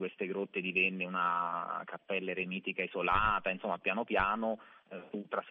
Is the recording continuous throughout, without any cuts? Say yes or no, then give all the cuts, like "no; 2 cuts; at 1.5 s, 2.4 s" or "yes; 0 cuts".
yes; 0 cuts